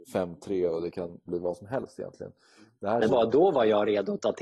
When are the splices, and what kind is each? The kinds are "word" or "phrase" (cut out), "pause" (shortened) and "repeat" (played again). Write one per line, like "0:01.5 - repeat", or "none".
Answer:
0:01.3 - word
0:03.1 - word

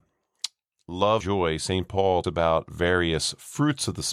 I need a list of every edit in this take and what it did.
0:01.2 - word
0:02.2 - word

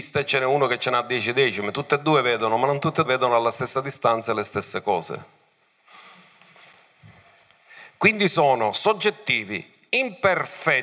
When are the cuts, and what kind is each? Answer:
0:03.0 - word

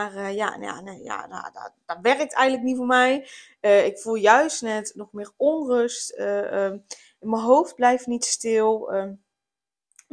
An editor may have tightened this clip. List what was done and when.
none

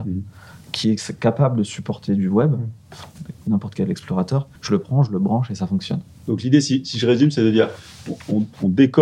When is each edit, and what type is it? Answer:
0:04.6 - pause

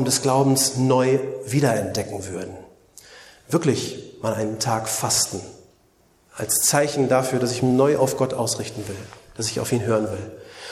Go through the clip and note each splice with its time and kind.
0:07.6 - word

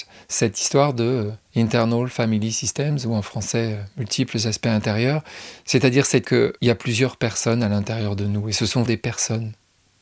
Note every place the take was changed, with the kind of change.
0:01.4 - pause
0:06.2 - word
0:06.6 - pause
0:08.8 - word

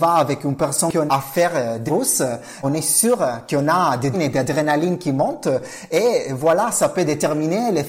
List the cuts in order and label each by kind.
0:01.1 - word
0:01.9 - word
0:02.6 - word
0:04.1 - word
0:06.7 - word

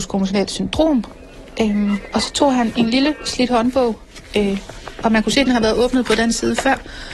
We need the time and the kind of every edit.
none

